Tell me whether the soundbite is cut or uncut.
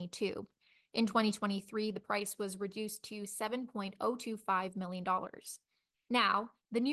uncut